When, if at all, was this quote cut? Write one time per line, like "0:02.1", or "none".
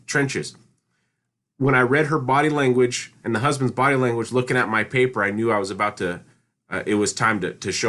none